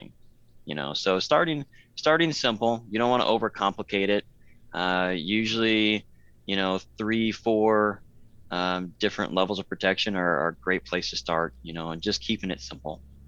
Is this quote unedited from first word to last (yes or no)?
yes